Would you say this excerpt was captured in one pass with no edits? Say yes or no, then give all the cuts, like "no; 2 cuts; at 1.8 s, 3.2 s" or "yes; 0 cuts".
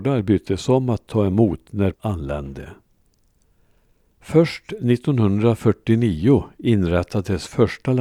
no; 1 cut; at 1.9 s